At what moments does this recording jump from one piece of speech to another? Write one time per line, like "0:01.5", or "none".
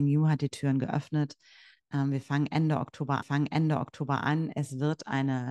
0:03.2